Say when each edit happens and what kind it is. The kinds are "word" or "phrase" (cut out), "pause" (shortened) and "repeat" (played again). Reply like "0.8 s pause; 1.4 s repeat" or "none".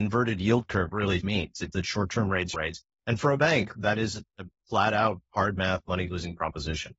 1.2 s word; 1.7 s word; 2.5 s phrase